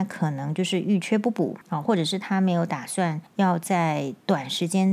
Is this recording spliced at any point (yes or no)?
yes